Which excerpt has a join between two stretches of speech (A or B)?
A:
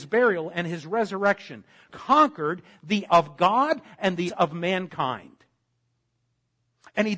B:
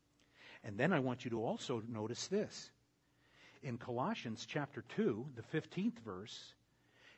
A